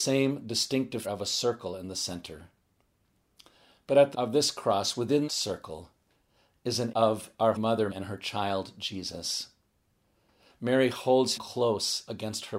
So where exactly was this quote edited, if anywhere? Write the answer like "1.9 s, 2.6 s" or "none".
1.0 s, 4.1 s, 5.3 s, 6.9 s, 7.6 s, 7.9 s, 11.4 s